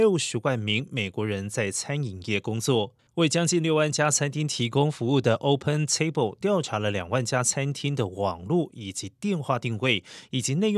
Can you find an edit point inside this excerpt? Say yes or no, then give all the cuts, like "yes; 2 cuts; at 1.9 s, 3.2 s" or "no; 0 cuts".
yes; 1 cut; at 3.0 s